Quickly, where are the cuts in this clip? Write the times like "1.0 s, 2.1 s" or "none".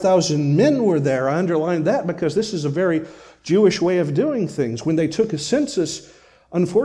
none